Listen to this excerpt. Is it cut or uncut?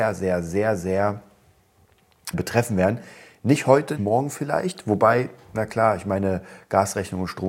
cut